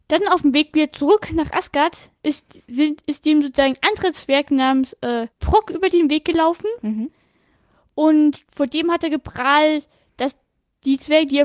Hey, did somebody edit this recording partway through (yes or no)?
yes